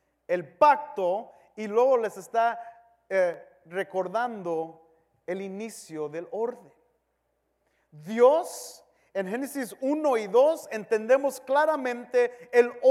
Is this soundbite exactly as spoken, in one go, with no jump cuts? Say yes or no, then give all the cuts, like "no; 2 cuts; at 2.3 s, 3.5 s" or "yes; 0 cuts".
yes; 0 cuts